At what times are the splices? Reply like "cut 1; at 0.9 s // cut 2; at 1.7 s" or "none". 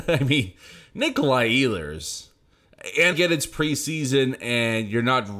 cut 1; at 3.1 s